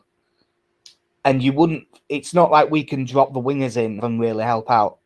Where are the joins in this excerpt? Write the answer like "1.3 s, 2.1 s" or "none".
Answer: 4.0 s

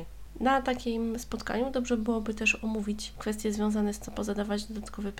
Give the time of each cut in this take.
4.1 s

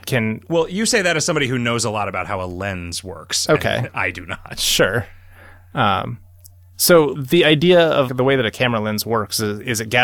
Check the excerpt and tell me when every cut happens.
7.2 s, 8.1 s

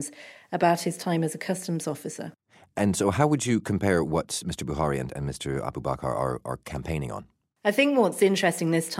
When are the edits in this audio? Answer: none

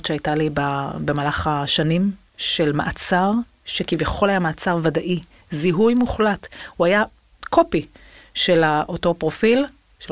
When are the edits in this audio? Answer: none

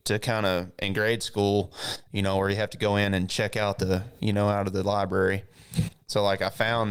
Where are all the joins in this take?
4.2 s

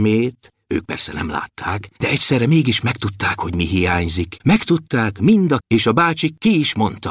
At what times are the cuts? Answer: 1.9 s, 4.4 s, 5.6 s

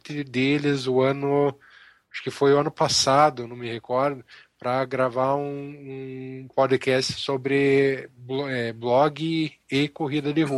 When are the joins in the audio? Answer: none

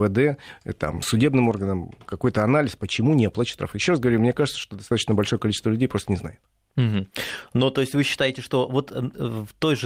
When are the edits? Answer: none

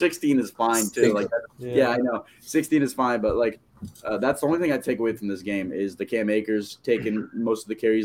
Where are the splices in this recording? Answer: 1.5 s

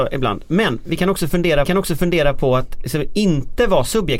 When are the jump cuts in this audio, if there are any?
1.6 s

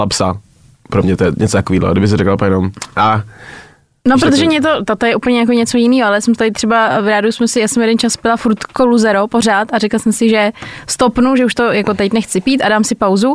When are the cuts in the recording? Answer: none

